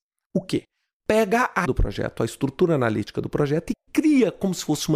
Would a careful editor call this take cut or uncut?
cut